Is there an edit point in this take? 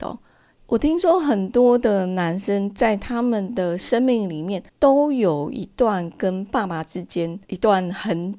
yes; 2 cuts; at 4.7 s, 7.4 s

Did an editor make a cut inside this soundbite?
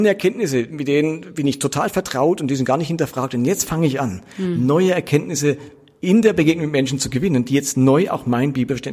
no; 0 cuts

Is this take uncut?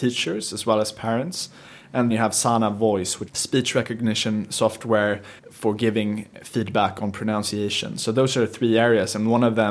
no; 3 cuts; at 2.1 s, 3.3 s, 5.4 s

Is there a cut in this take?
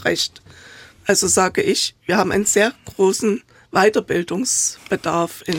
no; 0 cuts

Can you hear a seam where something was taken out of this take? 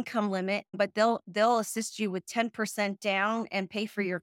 no; 0 cuts

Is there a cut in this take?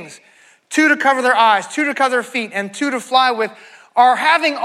no; 0 cuts

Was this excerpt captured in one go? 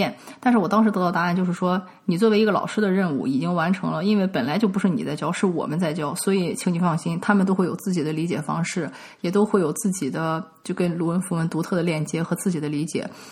yes; 0 cuts

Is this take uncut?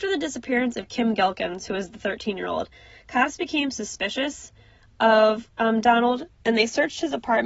yes; 0 cuts

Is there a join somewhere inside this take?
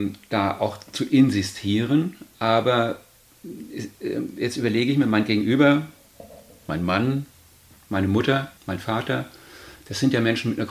yes; 1 cut; at 8.6 s

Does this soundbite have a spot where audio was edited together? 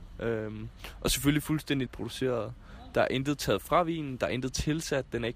yes; 1 cut; at 1.9 s

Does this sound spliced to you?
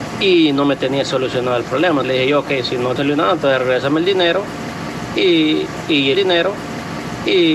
yes; 3 cuts; at 2.0 s, 3.0 s, 6.1 s

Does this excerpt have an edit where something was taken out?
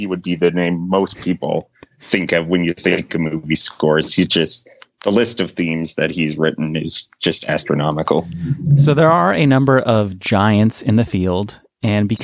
no; 0 cuts

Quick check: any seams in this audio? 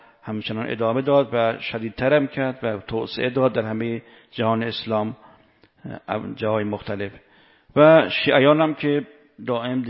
no; 0 cuts

